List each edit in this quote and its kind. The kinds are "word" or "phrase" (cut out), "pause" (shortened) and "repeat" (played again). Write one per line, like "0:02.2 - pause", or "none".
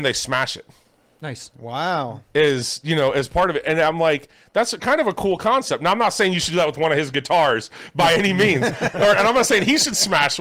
none

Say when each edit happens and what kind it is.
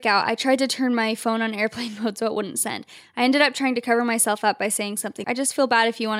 0:05.2 - word

